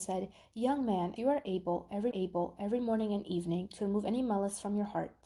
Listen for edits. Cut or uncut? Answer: cut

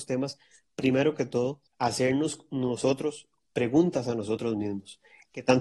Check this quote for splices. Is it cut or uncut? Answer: cut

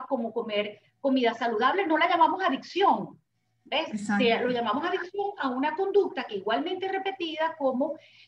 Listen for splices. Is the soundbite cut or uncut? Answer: uncut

